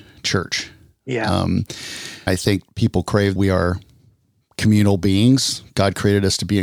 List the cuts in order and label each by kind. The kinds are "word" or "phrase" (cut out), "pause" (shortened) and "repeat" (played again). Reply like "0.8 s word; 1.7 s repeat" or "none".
2.3 s word; 2.7 s word; 3.4 s word